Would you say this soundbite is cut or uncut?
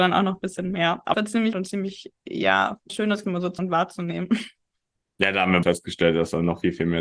cut